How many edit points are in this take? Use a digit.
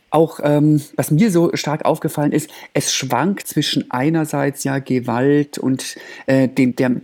1